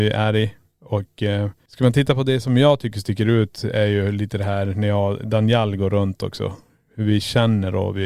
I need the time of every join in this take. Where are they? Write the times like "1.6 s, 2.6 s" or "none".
none